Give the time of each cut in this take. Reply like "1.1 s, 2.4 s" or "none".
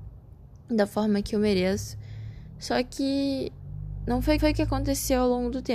4.4 s